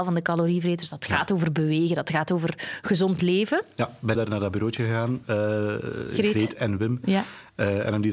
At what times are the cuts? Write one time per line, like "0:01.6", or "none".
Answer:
0:04.1
0:05.2